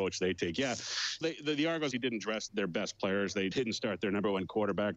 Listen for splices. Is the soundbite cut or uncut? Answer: cut